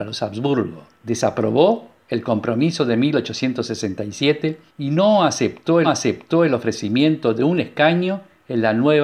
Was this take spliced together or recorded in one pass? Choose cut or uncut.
cut